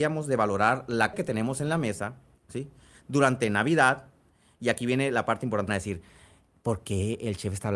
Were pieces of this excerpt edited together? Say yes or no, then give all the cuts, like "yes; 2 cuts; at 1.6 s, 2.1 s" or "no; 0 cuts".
yes; 2 cuts; at 1.1 s, 5.7 s